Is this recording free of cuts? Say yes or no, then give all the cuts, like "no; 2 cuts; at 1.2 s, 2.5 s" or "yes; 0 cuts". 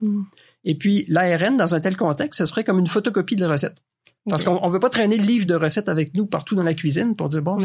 yes; 0 cuts